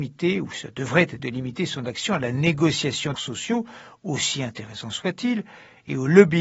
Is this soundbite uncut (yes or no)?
no